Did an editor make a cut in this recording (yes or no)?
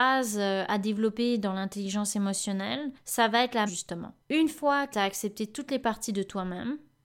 yes